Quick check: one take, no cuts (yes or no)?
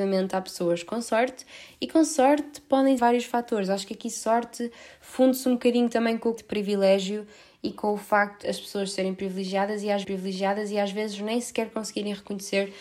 no